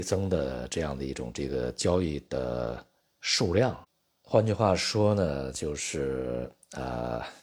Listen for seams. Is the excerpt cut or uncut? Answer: uncut